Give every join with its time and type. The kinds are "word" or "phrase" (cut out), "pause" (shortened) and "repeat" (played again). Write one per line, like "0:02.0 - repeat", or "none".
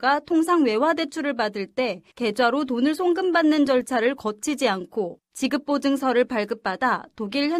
0:02.1 - pause
0:05.2 - pause